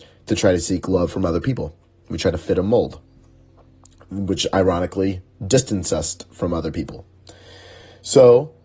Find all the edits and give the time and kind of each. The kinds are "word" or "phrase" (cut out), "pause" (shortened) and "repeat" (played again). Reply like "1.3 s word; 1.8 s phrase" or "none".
none